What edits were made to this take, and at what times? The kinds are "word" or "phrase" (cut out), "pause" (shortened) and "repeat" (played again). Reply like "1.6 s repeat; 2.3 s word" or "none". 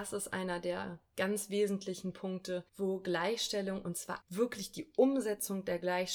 2.7 s pause; 4.2 s phrase